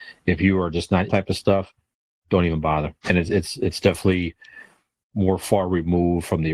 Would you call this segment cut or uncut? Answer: cut